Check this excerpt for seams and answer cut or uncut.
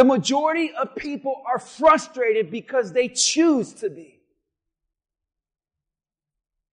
uncut